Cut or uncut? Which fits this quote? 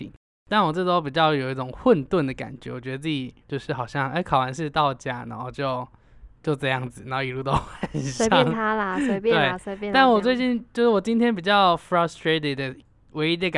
cut